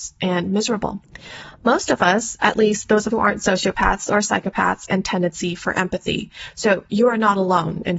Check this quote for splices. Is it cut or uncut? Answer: cut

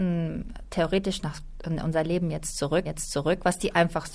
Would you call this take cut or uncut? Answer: cut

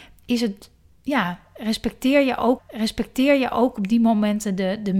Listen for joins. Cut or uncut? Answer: cut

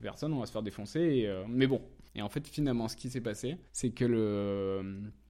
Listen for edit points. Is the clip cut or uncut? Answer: cut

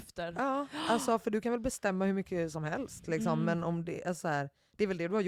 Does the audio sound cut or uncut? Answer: uncut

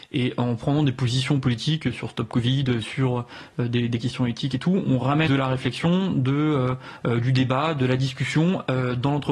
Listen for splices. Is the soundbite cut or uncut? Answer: cut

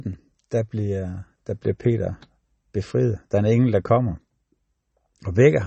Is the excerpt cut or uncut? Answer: uncut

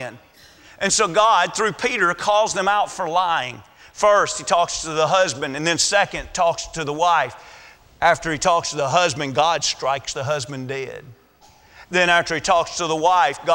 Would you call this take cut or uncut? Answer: uncut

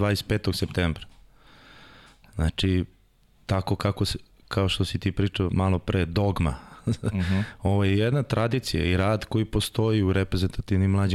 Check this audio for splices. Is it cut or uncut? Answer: uncut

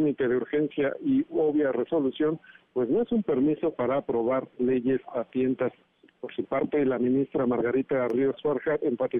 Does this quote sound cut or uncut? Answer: uncut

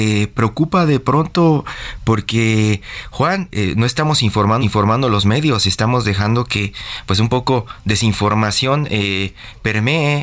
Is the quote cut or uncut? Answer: cut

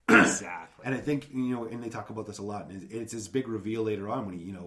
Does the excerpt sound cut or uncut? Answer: uncut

